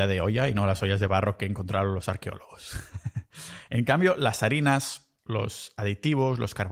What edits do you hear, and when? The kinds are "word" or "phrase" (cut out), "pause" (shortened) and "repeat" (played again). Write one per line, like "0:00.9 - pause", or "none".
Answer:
0:05.2 - pause